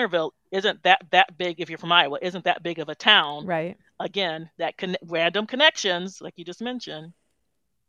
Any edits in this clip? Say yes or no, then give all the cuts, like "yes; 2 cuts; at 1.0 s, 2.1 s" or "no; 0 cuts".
yes; 1 cut; at 1.1 s